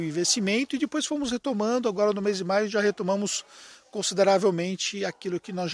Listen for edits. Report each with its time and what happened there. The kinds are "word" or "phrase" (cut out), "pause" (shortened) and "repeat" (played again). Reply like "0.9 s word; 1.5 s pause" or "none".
none